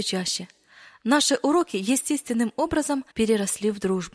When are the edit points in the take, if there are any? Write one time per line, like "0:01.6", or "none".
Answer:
0:03.1